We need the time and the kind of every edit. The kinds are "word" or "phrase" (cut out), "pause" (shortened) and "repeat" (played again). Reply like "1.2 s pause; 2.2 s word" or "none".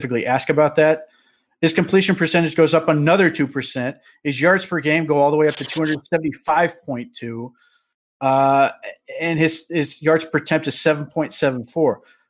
none